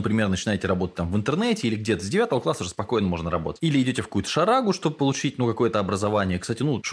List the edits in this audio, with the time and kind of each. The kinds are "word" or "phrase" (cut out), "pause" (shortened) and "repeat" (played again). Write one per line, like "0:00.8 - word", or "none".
none